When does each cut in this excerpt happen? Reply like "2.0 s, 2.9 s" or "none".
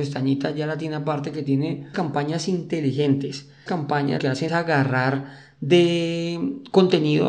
1.9 s, 3.7 s, 4.2 s, 4.5 s